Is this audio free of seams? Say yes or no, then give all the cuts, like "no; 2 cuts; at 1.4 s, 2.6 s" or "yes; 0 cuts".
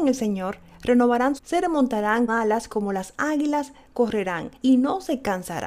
no; 3 cuts; at 1.4 s, 2.3 s, 4.6 s